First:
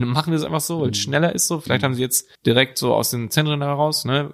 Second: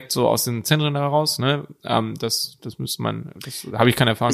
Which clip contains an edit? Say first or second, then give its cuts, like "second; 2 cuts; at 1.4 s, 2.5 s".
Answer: first; 1 cut; at 2.3 s